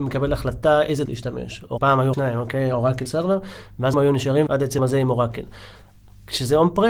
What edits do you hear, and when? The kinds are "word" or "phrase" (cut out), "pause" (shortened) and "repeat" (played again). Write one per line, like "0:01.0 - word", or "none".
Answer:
0:01.1 - word
0:01.8 - word
0:02.1 - word
0:03.1 - word
0:03.9 - word
0:04.5 - word
0:04.8 - word